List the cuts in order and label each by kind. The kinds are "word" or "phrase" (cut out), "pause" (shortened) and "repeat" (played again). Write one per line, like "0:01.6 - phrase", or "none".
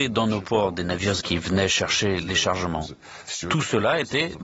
0:01.2 - word